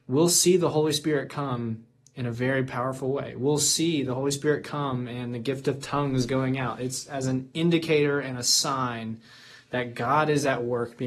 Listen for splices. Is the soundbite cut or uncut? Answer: uncut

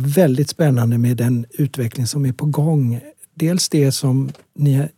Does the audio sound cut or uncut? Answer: uncut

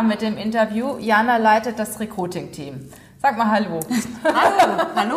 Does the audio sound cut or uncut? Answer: uncut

